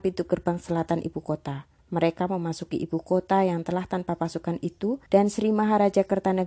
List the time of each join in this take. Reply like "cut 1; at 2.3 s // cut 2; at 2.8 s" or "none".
cut 1; at 1.8 s // cut 2; at 5.1 s

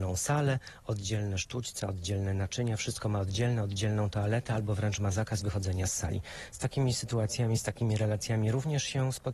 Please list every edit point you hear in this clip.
none

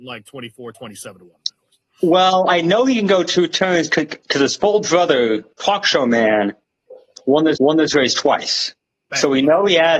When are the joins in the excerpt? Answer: cut 1; at 4.2 s // cut 2; at 7.6 s

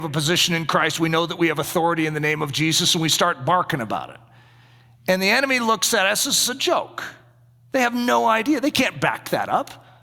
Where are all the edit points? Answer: none

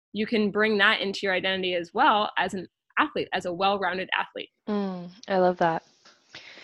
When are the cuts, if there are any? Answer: cut 1; at 4.6 s

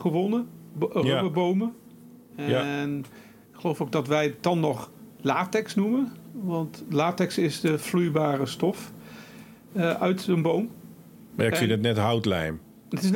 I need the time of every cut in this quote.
none

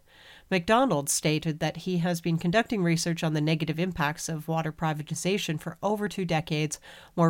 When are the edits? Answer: none

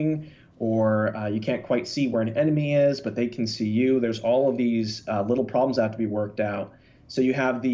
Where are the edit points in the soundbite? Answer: none

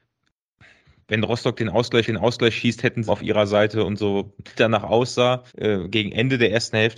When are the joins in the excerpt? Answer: cut 1; at 2.0 s // cut 2; at 3.1 s // cut 3; at 4.5 s // cut 4; at 5.5 s

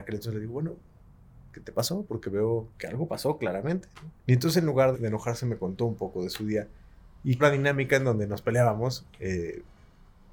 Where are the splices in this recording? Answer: cut 1; at 1.5 s // cut 2; at 2.7 s // cut 3; at 4.2 s // cut 4; at 4.9 s // cut 5; at 7.4 s

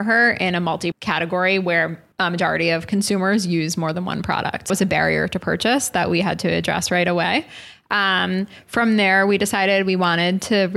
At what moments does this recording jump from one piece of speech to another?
cut 1; at 0.9 s // cut 2; at 2.1 s // cut 3; at 4.7 s

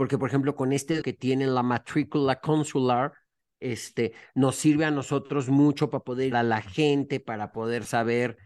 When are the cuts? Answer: cut 1; at 1.0 s // cut 2; at 6.3 s

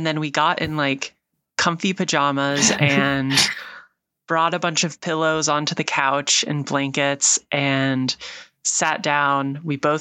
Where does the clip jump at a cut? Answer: none

